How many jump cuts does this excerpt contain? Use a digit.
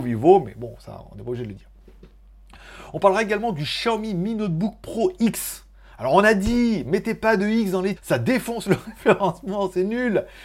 1